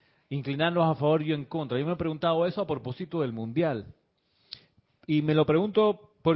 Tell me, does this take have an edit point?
no; 0 cuts

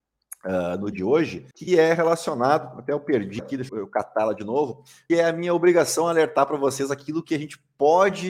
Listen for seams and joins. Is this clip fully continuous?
no; 5 cuts; at 0.9 s, 1.5 s, 3.4 s, 3.7 s, 5.1 s

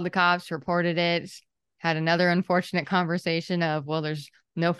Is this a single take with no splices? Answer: yes; 0 cuts

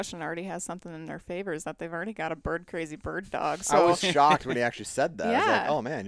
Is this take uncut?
yes; 0 cuts

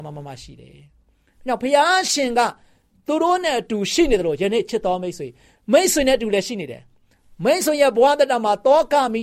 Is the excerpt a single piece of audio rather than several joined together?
yes; 0 cuts

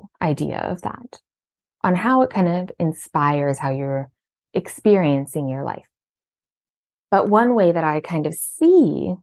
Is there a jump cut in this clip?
no; 0 cuts

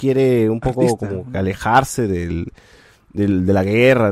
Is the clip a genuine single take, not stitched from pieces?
yes; 0 cuts

